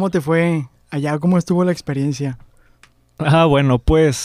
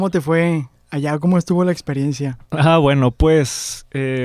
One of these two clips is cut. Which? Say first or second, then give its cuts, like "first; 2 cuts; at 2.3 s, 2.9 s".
second; 1 cut; at 2.5 s